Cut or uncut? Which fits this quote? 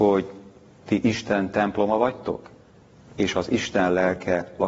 uncut